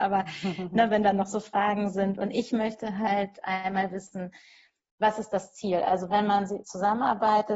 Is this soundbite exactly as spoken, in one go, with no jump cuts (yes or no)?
yes